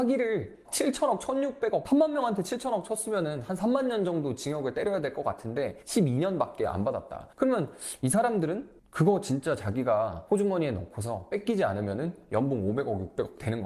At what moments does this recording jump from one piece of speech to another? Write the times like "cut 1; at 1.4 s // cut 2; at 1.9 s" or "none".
cut 1; at 1.8 s